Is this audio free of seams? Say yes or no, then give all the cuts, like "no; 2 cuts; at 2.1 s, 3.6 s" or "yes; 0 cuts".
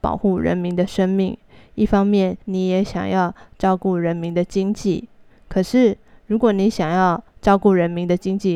no; 2 cuts; at 2.4 s, 7.3 s